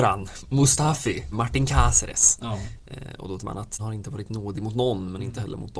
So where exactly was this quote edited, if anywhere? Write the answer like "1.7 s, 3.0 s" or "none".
1.3 s, 3.4 s, 3.8 s